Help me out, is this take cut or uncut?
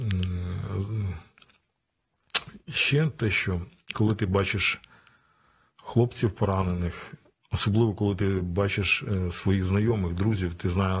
uncut